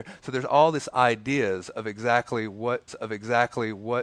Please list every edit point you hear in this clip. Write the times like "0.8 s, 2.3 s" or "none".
2.9 s